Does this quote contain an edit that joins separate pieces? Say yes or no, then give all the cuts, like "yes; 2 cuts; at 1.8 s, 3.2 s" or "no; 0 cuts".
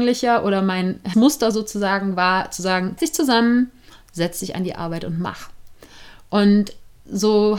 yes; 2 cuts; at 1.1 s, 3.0 s